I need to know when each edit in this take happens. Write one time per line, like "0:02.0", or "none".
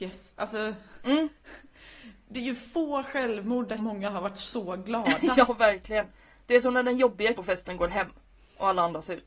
0:03.8
0:07.4